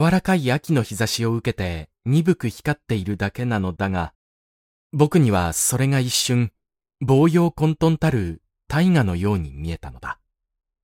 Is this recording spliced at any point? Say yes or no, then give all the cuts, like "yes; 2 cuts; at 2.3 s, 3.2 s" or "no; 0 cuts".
no; 0 cuts